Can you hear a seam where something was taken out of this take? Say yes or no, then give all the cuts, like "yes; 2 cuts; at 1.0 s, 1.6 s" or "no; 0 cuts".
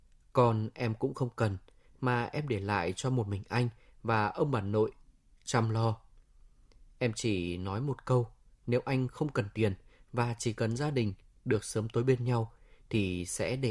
no; 0 cuts